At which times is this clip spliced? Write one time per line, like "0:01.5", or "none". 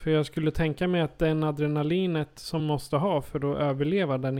0:02.6